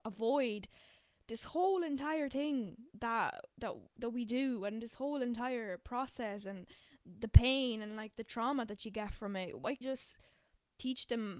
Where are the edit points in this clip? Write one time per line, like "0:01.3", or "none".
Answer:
0:02.9
0:09.8